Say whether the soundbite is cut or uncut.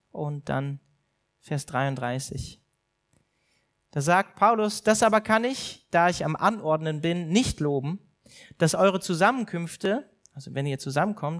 uncut